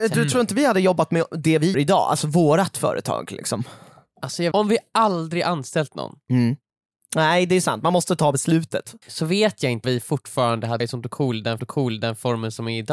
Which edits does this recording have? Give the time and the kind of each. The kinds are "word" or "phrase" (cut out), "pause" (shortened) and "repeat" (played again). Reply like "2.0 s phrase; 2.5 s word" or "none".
1.7 s word; 4.5 s word; 6.7 s pause; 9.0 s pause; 9.8 s word; 10.8 s word; 11.6 s repeat